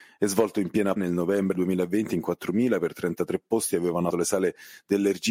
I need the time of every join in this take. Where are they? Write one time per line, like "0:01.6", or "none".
0:01.0
0:01.5
0:04.1